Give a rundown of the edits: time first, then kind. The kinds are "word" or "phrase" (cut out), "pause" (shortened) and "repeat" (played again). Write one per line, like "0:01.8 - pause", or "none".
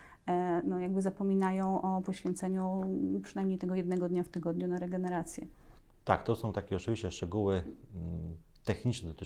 none